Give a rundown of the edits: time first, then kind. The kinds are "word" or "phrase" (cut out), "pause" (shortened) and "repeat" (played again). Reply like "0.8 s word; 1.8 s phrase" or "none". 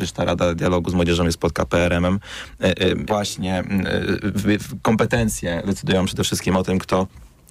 3.1 s phrase